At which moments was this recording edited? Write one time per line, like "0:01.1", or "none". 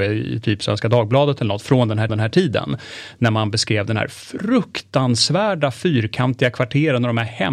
0:02.1